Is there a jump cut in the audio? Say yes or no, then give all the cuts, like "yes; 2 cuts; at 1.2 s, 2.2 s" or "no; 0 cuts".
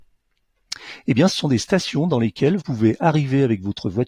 yes; 2 cuts; at 1.3 s, 2.6 s